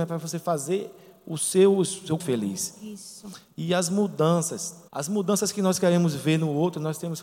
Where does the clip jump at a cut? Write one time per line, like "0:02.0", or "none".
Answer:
0:02.2
0:04.9